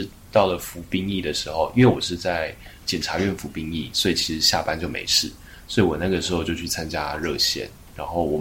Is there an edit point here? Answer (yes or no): no